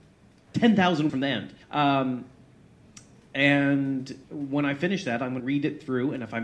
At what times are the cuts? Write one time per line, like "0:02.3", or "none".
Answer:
0:01.1
0:01.6
0:04.2
0:05.4